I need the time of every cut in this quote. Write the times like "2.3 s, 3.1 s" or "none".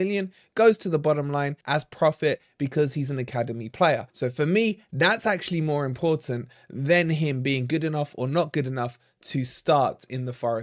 1.6 s, 4.1 s